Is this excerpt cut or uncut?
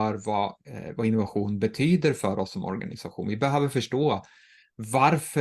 uncut